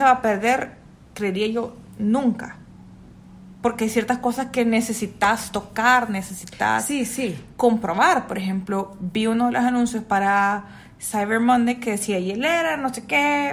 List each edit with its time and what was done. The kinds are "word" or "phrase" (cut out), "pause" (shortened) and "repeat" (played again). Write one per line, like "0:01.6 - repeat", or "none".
none